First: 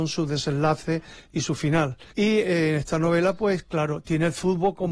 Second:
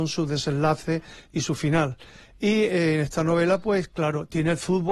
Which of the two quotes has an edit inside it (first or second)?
first